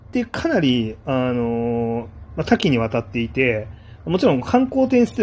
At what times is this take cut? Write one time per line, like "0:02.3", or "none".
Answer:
none